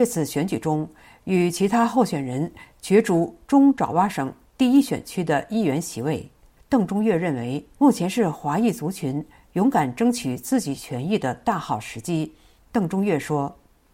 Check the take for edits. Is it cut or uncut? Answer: uncut